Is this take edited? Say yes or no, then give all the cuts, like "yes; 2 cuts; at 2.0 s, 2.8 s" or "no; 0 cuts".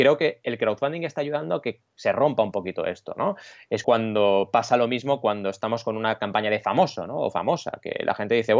yes; 1 cut; at 3.8 s